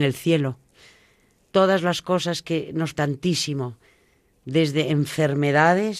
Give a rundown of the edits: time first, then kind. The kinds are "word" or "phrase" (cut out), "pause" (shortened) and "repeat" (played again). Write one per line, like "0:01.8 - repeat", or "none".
0:03.0 - word